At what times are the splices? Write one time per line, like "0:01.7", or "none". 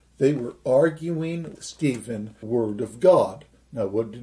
0:01.5
0:02.4